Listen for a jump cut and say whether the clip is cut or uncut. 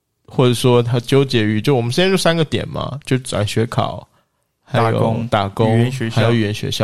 uncut